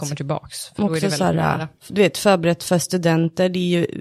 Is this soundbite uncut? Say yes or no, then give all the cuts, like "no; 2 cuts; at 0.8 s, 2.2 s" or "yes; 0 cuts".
no; 1 cut; at 1.8 s